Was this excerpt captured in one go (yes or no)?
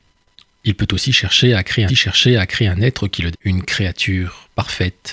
no